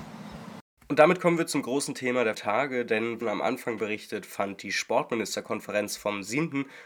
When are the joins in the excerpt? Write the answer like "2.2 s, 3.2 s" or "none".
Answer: 2.3 s, 3.2 s